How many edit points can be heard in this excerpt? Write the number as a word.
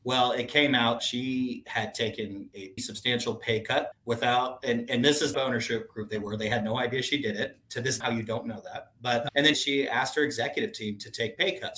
six